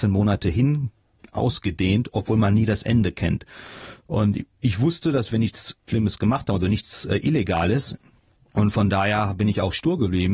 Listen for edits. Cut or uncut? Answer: uncut